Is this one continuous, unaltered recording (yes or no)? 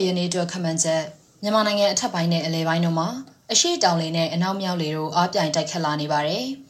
yes